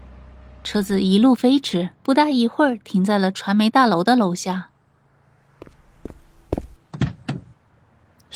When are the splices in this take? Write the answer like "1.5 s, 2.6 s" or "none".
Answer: 2.0 s

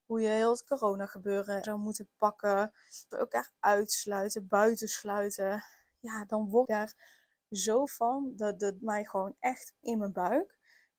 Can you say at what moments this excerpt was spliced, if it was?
1.6 s, 3.1 s, 6.6 s, 7.9 s, 8.8 s, 9.8 s

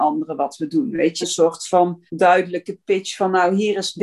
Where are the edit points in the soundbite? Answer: 1.2 s, 2.1 s

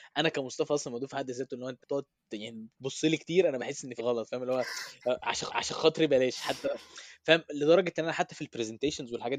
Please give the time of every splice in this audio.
1.8 s, 4.0 s, 5.5 s

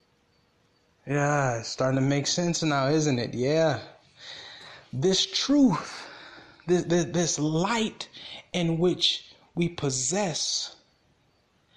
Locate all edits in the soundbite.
none

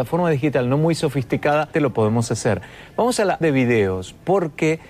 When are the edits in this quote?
1.7 s, 3.4 s

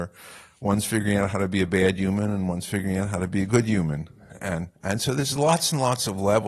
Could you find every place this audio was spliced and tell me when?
4.7 s

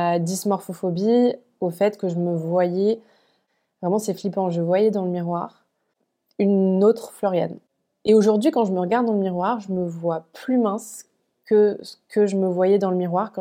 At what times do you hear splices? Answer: none

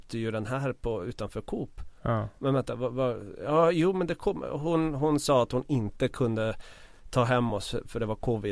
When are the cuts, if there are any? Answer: none

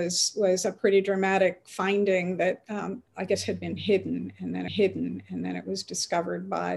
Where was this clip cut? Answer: 3.1 s, 4.7 s

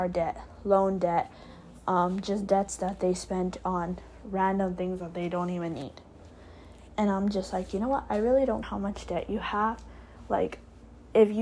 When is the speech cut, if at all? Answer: 8.6 s

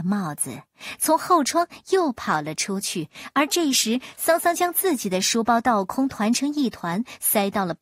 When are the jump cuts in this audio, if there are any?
none

